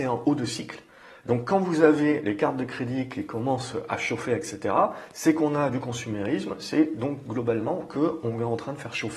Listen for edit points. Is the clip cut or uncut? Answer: uncut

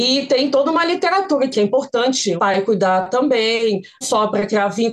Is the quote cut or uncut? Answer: cut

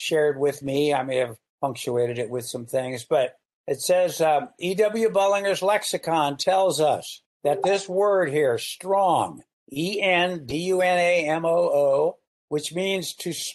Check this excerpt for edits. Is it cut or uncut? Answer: uncut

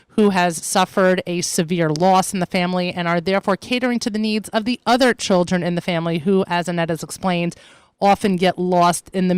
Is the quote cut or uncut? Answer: uncut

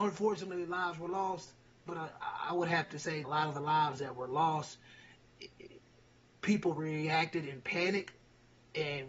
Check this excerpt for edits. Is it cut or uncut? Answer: cut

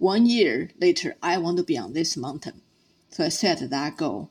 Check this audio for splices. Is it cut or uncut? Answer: uncut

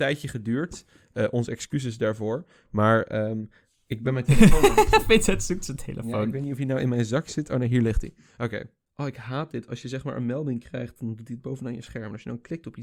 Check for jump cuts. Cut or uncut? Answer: uncut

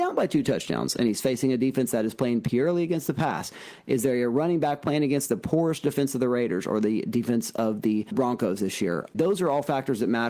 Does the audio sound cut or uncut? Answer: uncut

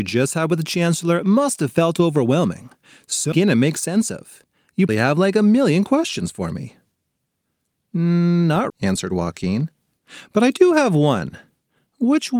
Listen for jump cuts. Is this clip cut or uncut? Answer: cut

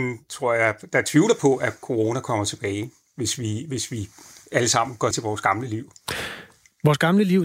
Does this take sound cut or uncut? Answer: cut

